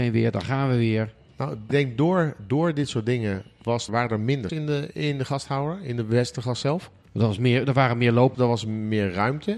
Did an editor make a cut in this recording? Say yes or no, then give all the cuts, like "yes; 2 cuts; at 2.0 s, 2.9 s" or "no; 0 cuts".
yes; 4 cuts; at 1.7 s, 3.9 s, 4.5 s, 8.3 s